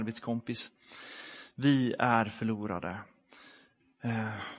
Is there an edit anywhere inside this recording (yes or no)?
no